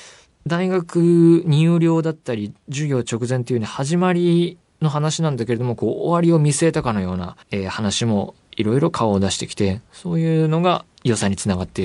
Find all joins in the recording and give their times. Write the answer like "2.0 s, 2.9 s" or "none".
7.4 s, 10.9 s